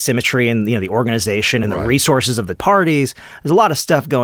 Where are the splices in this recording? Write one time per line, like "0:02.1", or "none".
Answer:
0:01.6
0:02.6